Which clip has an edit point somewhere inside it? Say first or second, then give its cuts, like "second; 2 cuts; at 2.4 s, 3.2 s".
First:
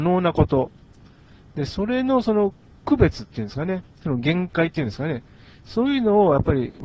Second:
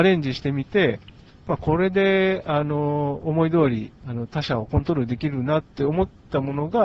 second; 2 cuts; at 4.0 s, 5.7 s